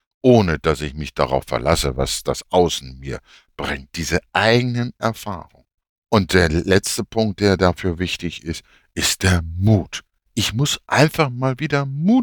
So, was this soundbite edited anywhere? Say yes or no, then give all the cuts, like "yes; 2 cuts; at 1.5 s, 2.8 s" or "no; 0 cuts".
no; 0 cuts